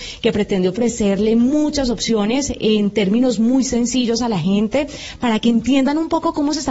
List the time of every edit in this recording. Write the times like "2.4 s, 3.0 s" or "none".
none